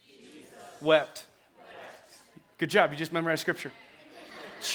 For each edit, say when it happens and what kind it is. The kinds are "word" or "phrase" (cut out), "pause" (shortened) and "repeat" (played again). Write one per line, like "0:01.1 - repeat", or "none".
none